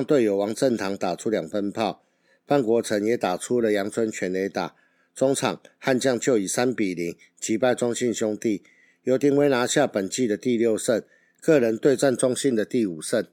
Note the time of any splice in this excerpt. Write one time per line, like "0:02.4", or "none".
none